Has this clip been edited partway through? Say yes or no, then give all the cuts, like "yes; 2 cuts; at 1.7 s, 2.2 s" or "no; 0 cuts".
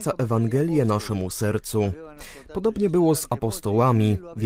no; 0 cuts